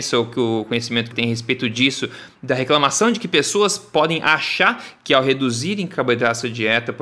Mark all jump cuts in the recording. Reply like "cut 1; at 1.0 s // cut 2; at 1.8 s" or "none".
cut 1; at 1.1 s